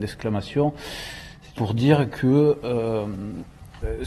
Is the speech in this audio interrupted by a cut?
yes; 1 cut; at 1.6 s

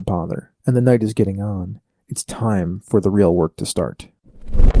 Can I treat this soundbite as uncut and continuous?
yes; 0 cuts

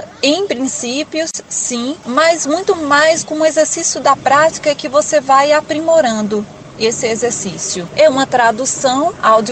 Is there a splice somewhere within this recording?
no; 0 cuts

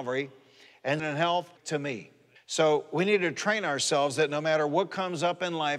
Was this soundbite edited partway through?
yes; 3 cuts; at 1.0 s, 1.6 s, 2.4 s

